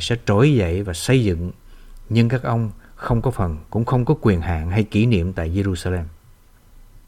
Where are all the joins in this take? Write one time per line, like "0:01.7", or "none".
0:03.7

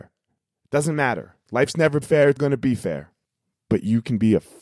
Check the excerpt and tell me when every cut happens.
0:02.0
0:02.4

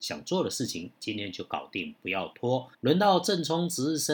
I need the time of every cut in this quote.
0:02.7

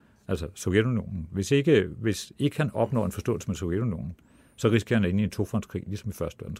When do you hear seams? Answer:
none

